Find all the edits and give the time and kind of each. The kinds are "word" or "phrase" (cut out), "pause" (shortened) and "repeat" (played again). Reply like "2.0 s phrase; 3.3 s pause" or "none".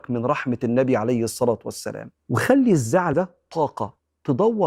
2.2 s pause; 3.1 s word